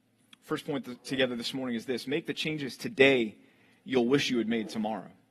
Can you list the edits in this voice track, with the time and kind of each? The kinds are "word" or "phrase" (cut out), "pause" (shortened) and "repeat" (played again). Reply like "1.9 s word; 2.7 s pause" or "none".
none